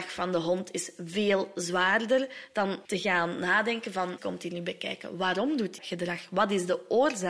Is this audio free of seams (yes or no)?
no